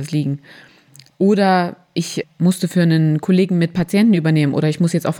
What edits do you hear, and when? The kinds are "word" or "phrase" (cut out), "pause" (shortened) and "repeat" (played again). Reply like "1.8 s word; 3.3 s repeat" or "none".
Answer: none